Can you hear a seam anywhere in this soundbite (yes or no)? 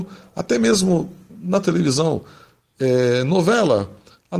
yes